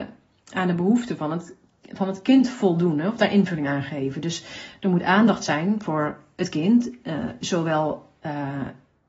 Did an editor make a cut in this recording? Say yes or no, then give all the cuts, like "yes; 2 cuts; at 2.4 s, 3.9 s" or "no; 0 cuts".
no; 0 cuts